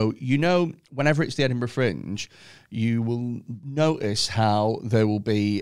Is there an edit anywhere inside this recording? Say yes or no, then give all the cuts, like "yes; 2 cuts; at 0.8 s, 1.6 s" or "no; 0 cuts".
no; 0 cuts